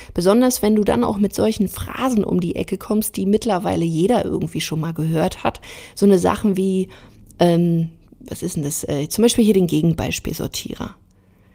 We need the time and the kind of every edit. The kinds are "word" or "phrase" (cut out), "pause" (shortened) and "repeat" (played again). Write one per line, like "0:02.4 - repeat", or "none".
0:08.1 - pause